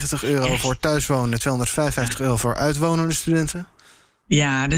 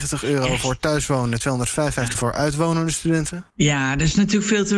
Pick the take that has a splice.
second; 2 cuts; at 2.1 s, 3.5 s

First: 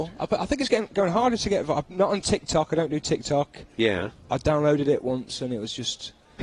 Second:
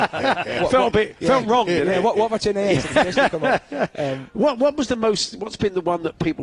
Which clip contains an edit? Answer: second; 1 cut; at 2.4 s

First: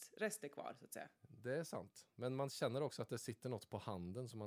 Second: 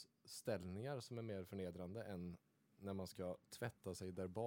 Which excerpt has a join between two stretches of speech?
first; 1 cut; at 1.2 s

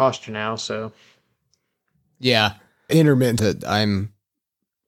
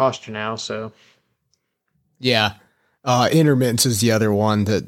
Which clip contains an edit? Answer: first; 2 cuts; at 2.9 s, 3.4 s

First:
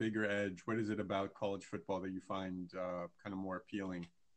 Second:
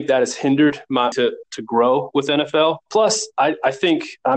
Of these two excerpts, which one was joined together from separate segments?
second; 3 cuts; at 1.1 s, 1.4 s, 2.8 s

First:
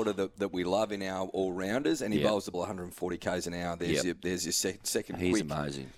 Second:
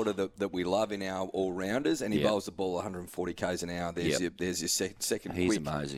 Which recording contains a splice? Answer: first; 1 cut; at 2.5 s

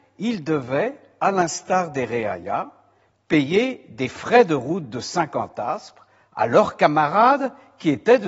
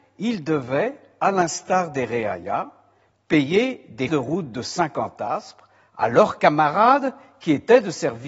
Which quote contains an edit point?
second; 1 cut; at 4.1 s

